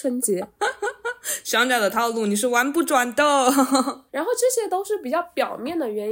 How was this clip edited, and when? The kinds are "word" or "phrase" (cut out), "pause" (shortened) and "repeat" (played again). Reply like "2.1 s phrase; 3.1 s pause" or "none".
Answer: 4.1 s pause